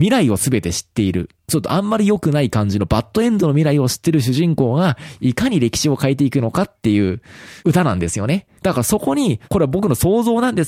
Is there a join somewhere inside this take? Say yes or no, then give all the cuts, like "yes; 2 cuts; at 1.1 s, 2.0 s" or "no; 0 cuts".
yes; 3 cuts; at 7.6 s, 8.6 s, 9.4 s